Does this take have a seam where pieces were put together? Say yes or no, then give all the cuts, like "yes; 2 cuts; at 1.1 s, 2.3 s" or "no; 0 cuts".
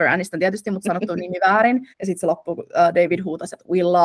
yes; 1 cut; at 1.9 s